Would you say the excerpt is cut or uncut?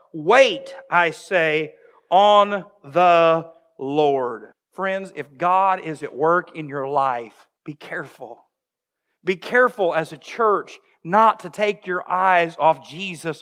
cut